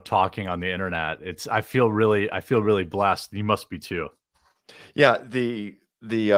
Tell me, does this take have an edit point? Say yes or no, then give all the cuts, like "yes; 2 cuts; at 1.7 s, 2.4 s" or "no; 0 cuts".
no; 0 cuts